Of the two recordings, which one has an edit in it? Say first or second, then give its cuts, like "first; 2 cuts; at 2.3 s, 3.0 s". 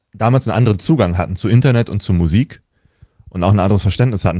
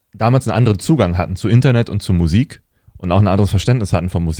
second; 1 cut; at 2.8 s